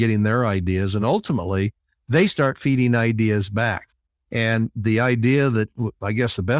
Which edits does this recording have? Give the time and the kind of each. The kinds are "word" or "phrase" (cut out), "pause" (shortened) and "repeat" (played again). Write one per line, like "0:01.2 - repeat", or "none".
none